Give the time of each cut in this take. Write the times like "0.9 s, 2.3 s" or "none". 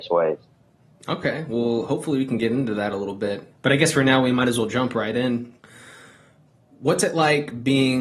none